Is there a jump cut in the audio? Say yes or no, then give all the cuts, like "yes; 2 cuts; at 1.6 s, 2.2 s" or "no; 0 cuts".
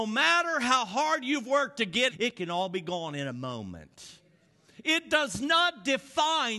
yes; 1 cut; at 2.1 s